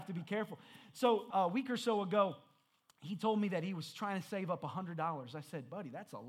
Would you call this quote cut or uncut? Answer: cut